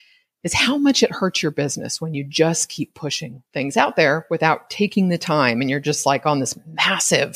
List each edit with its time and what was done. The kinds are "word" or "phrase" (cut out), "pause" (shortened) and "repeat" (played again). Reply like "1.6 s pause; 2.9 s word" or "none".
3.5 s pause